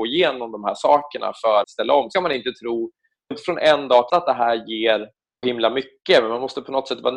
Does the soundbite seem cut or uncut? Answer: cut